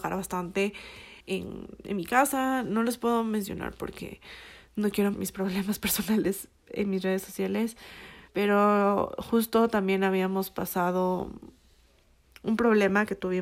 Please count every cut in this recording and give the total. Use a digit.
3